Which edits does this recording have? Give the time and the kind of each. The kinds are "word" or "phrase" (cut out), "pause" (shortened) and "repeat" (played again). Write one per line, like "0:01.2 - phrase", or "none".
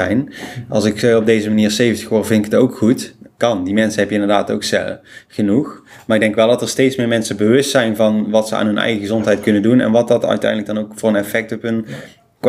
none